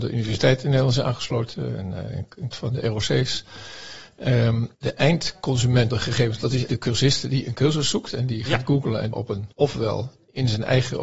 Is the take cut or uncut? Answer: cut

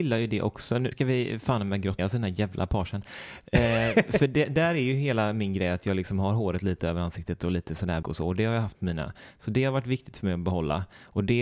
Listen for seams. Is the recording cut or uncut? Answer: cut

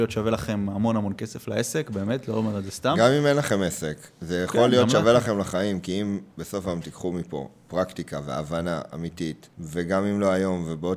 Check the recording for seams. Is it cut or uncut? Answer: cut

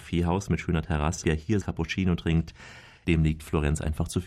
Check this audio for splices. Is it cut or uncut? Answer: cut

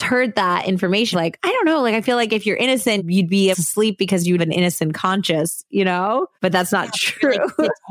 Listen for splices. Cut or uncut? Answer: cut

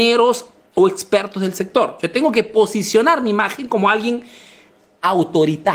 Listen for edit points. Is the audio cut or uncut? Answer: uncut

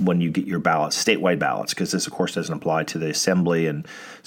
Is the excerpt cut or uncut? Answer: uncut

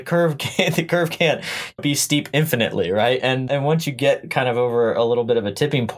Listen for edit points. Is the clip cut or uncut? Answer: cut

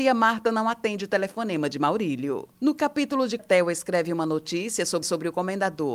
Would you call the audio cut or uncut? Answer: cut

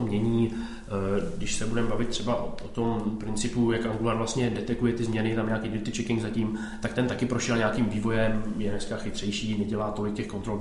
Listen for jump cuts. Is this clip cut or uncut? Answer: uncut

